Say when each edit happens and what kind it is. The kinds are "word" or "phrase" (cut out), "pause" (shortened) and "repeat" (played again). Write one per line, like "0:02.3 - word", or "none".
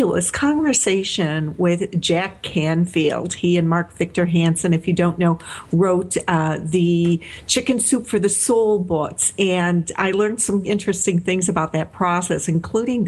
0:10.6 - word